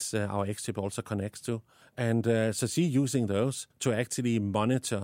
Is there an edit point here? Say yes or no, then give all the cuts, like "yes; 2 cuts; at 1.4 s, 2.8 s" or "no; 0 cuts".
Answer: yes; 2 cuts; at 1.8 s, 3.7 s